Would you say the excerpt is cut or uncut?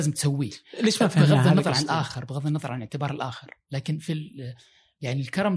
uncut